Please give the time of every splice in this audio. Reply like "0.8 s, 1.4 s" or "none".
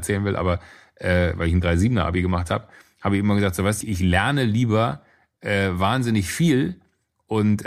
3.8 s